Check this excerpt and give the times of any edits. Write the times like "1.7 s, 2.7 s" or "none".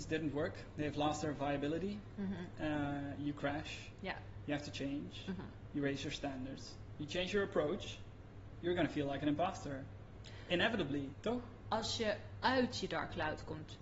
none

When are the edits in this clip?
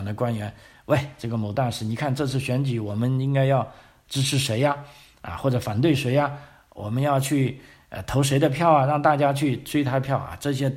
none

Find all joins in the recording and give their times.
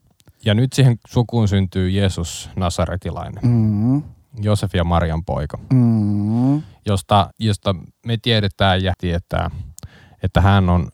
7.3 s, 8.9 s

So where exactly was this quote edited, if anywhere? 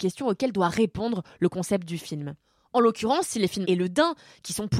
3.6 s

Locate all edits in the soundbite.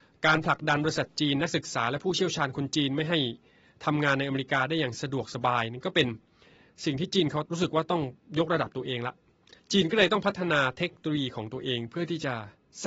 none

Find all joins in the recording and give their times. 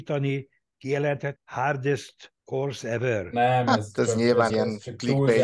1.4 s, 2.4 s, 4.5 s

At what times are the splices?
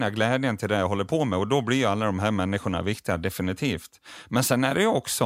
none

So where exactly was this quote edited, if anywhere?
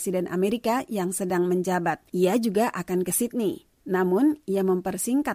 2.1 s, 3.8 s

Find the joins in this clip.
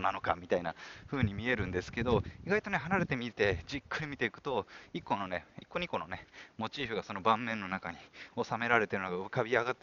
5.6 s

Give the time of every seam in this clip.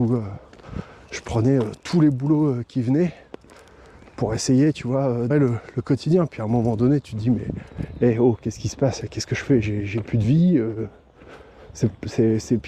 5.3 s

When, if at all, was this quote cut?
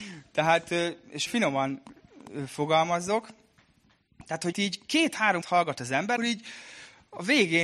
1.3 s, 4.5 s, 5.4 s, 6.2 s

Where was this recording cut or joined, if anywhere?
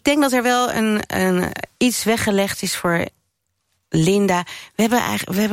none

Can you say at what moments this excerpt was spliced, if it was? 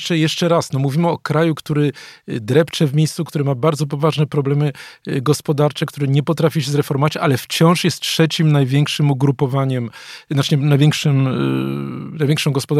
none

